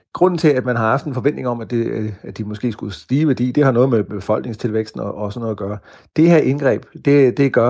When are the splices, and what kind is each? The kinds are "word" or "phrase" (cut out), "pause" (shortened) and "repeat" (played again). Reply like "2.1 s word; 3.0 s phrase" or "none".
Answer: none